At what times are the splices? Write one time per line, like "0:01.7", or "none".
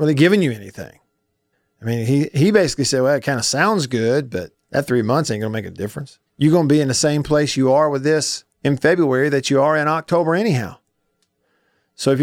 0:01.5
0:04.6
0:06.3
0:08.5